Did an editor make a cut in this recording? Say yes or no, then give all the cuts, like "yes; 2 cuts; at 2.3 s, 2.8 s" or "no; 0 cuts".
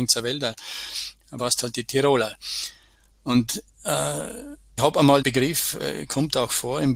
yes; 3 cuts; at 1.4 s, 4.8 s, 5.2 s